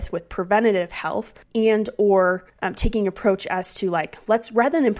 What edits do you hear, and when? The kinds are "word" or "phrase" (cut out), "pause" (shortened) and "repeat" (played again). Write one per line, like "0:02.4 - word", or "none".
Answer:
0:01.4 - pause
0:02.5 - pause